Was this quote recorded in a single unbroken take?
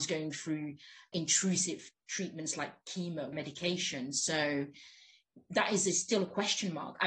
no; 2 cuts; at 1.1 s, 3.3 s

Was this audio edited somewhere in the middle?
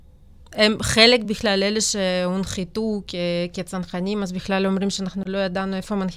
no; 0 cuts

